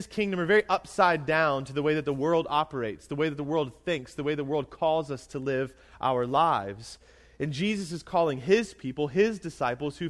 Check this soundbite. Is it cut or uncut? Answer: uncut